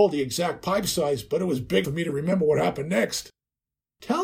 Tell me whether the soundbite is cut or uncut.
cut